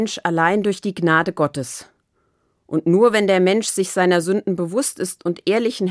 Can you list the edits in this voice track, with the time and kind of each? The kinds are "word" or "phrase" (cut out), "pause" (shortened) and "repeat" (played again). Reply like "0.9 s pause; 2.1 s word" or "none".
none